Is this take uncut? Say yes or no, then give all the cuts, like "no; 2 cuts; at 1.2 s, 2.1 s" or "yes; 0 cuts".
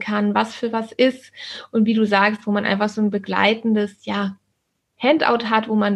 yes; 0 cuts